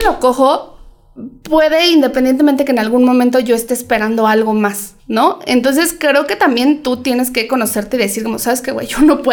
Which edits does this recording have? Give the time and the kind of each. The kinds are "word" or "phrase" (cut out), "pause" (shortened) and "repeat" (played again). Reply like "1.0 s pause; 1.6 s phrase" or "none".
5.0 s pause

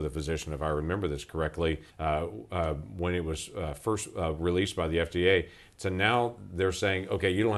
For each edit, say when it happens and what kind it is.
1.9 s pause

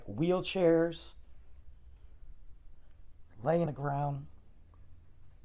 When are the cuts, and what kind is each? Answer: 3.7 s word

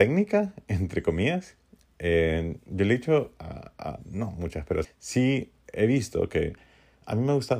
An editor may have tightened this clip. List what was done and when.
4.8 s word

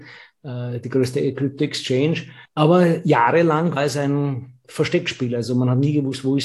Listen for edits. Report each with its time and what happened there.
2.5 s pause; 3.8 s word

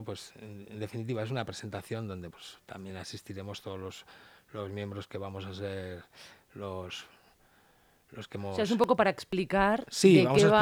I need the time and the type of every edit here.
2.3 s word

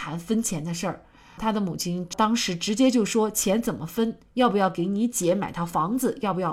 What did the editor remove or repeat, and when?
none

